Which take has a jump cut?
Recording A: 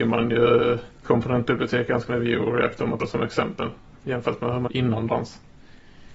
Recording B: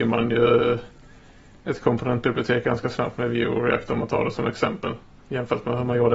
A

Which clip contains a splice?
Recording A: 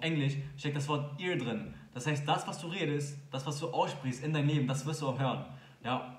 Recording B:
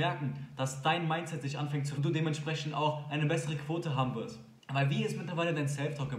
B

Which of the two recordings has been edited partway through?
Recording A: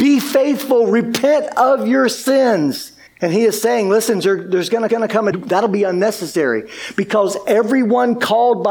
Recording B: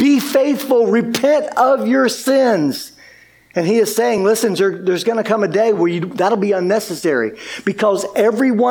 A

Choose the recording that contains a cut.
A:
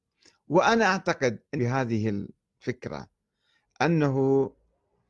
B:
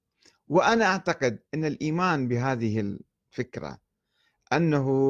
A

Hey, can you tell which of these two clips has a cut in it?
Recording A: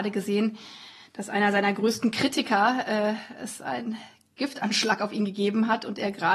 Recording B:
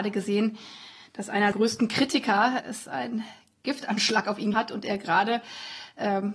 B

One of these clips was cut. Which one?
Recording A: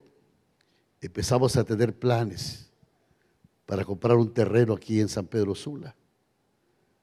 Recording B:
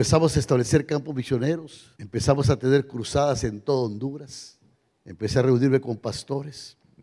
B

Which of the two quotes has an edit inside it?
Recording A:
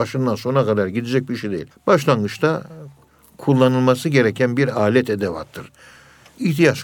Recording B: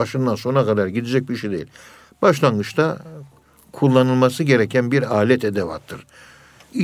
A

